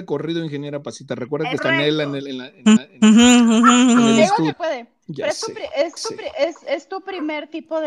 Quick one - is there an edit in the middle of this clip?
yes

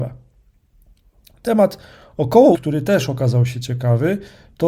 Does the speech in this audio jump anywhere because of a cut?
yes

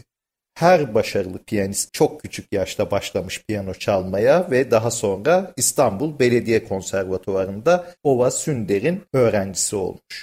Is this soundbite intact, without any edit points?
no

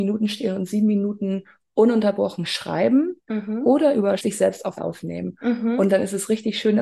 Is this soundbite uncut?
no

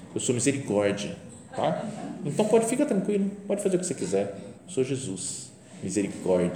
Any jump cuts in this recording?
yes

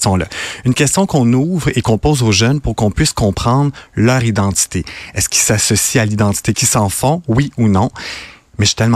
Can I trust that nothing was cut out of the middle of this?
no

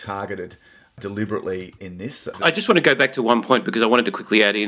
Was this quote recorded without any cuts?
no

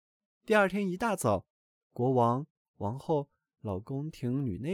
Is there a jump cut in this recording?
no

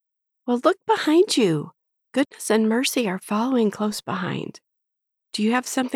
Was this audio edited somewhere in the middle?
no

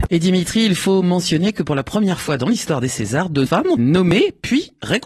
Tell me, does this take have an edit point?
yes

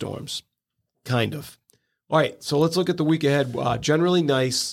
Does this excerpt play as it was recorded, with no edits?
yes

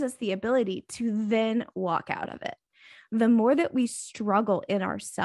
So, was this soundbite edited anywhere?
no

